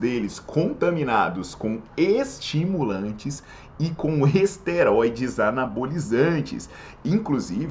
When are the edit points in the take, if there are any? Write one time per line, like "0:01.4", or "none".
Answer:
none